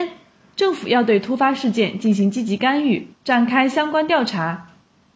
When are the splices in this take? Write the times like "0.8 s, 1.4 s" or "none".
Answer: 3.1 s